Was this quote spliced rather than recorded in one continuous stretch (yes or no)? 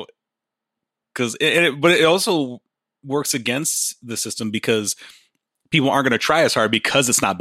no